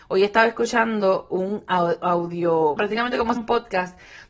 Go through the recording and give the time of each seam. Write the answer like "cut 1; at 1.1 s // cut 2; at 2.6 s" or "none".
cut 1; at 2.8 s // cut 2; at 3.4 s